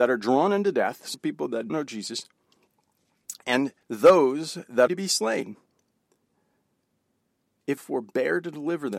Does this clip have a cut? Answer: yes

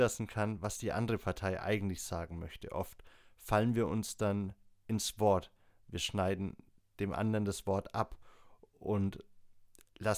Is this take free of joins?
yes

